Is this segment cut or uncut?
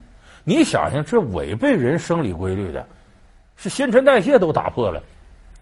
uncut